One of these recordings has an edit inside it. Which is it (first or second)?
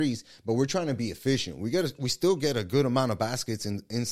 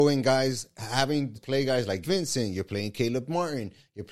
second